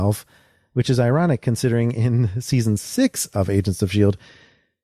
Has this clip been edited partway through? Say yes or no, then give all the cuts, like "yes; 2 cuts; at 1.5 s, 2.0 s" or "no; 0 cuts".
no; 0 cuts